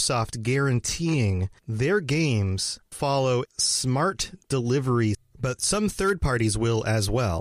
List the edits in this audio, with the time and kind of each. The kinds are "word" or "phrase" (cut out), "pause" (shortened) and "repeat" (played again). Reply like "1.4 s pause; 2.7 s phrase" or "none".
1.6 s word; 2.9 s word; 3.5 s word; 5.1 s word